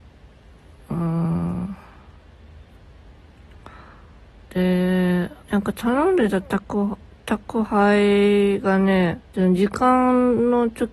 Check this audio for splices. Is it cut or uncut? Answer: cut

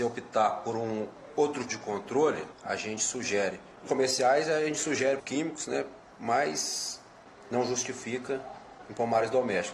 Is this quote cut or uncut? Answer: cut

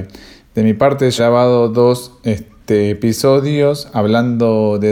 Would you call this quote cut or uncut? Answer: cut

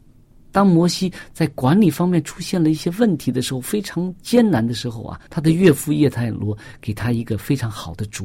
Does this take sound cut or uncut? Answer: cut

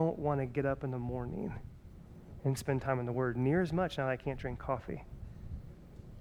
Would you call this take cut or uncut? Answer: uncut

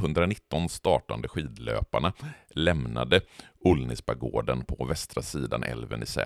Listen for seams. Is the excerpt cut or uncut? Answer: uncut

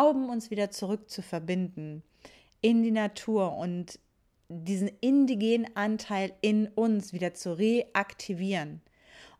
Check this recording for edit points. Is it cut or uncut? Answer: uncut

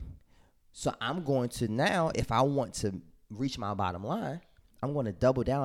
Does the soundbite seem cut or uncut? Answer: uncut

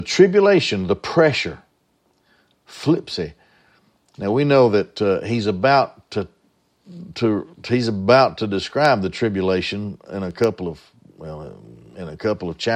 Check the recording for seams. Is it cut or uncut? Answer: uncut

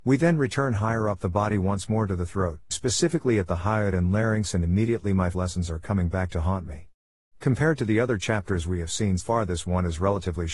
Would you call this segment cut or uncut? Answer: cut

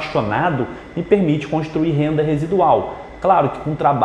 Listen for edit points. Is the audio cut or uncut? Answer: uncut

